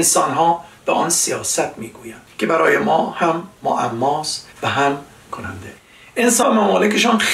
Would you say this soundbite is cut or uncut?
cut